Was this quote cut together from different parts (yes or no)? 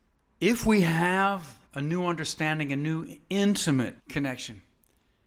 yes